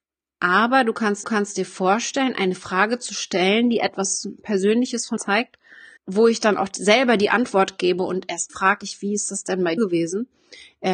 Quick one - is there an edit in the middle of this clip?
yes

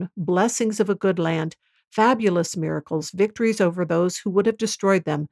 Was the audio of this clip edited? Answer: no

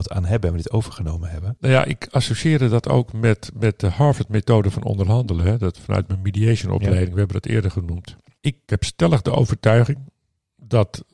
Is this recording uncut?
yes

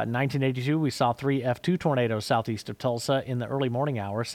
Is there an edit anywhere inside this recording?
no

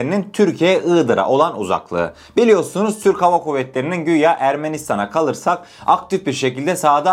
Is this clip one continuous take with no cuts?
yes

